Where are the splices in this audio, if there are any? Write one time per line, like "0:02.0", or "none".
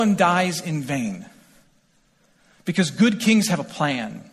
none